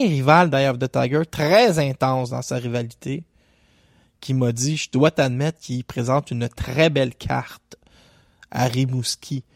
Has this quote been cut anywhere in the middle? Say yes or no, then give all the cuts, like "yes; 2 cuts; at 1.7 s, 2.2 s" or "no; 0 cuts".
no; 0 cuts